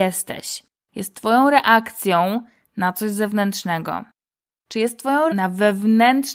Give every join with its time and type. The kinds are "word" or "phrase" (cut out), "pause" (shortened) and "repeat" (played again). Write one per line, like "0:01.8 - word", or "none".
0:05.3 - word